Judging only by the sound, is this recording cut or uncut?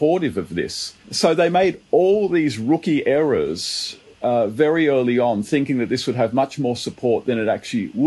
cut